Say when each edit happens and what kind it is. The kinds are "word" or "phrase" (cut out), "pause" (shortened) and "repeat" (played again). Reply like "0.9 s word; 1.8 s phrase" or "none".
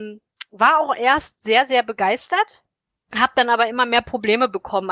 2.8 s pause